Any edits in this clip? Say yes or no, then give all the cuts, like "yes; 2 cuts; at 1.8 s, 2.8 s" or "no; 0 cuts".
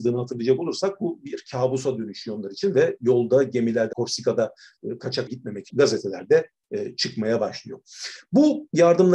yes; 3 cuts; at 3.9 s, 5.3 s, 5.7 s